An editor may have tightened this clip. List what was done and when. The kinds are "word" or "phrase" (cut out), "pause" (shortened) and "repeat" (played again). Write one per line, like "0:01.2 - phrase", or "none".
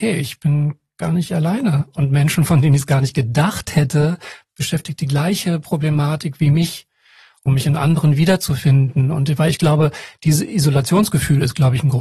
0:04.5 - word